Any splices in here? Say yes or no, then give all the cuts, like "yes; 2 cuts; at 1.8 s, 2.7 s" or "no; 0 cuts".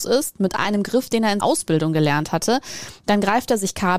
yes; 1 cut; at 1.4 s